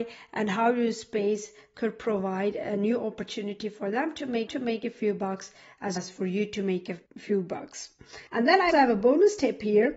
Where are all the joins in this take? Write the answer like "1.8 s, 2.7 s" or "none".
4.5 s, 6.0 s, 7.1 s, 8.3 s, 8.7 s